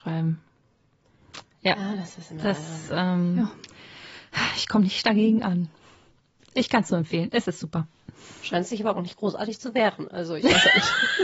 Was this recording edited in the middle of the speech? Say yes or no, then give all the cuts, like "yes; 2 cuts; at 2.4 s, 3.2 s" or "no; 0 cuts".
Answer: no; 0 cuts